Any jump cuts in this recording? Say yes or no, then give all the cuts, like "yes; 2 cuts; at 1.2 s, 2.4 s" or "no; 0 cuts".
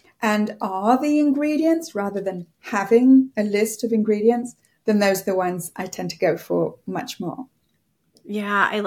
no; 0 cuts